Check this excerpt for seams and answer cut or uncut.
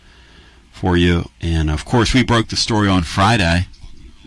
uncut